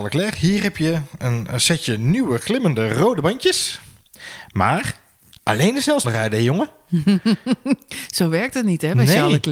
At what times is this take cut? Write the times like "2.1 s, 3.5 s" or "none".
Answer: 1.2 s, 6.0 s